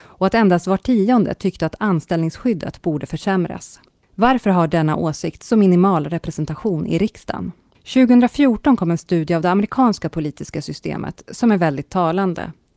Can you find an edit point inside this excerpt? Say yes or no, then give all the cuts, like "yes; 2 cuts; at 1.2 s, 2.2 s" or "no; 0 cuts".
no; 0 cuts